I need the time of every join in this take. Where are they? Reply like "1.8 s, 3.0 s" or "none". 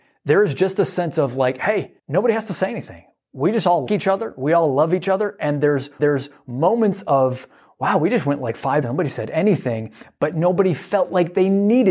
2.0 s, 3.9 s, 6.0 s, 8.8 s